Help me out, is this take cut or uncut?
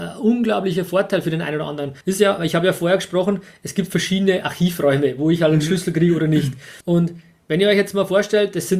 cut